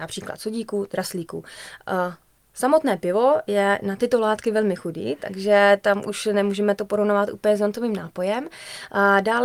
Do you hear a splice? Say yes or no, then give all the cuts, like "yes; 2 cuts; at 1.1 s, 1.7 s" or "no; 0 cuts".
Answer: no; 0 cuts